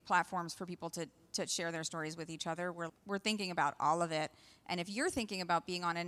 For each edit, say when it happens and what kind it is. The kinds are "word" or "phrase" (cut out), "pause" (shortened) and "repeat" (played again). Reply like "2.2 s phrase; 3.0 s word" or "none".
2.9 s word